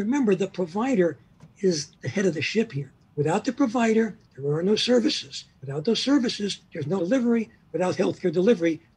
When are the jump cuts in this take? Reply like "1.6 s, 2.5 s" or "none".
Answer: 1.9 s, 3.1 s, 4.3 s, 5.5 s, 7.0 s